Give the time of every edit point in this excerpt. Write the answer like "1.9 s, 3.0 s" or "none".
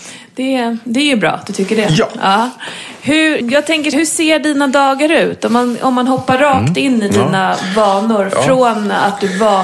3.4 s, 3.9 s